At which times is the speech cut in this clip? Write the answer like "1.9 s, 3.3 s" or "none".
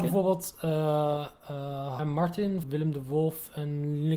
2.0 s, 2.6 s